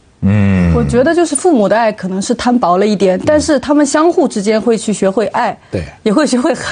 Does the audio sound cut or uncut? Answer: uncut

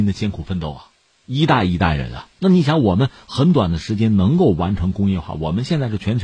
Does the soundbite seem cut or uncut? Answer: cut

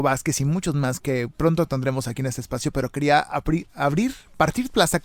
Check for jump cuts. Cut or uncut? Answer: cut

